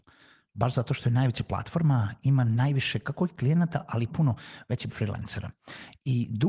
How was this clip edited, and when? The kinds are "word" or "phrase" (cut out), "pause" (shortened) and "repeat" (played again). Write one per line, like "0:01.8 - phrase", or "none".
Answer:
0:04.1 - word
0:04.9 - word